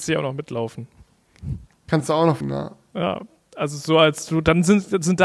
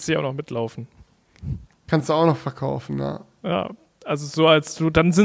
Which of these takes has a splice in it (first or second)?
first